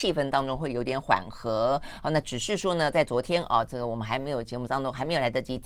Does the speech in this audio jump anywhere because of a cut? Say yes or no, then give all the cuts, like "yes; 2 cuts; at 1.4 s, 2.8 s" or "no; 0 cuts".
no; 0 cuts